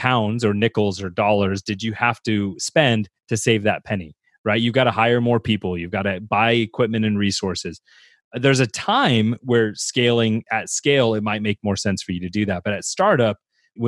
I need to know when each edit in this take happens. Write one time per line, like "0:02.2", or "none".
none

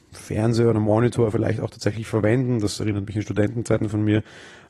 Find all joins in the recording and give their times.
none

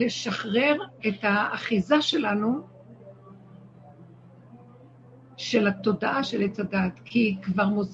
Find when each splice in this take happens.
0:01.0

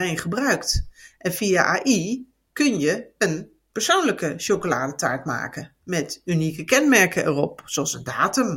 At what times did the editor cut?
none

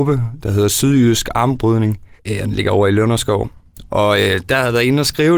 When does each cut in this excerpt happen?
0:02.2

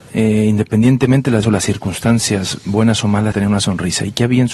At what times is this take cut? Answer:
0:01.4
0:03.3

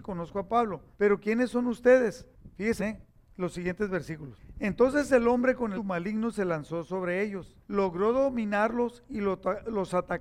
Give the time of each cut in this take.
0:00.9
0:02.8
0:05.8
0:07.6

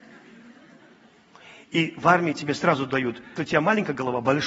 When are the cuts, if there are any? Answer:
0:03.4

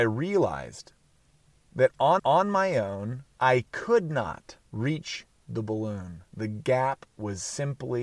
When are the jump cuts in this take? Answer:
0:02.2
0:03.3
0:04.7

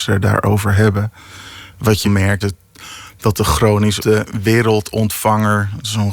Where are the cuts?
0:02.0
0:02.4
0:04.0

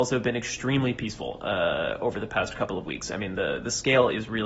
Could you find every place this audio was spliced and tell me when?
none

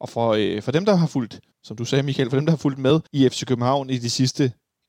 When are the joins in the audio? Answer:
0:01.5
0:03.1

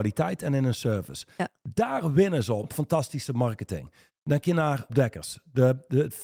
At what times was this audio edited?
0:02.6
0:04.4
0:04.9

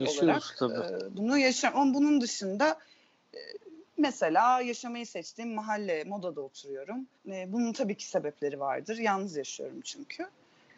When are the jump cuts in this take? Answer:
0:03.9
0:07.2

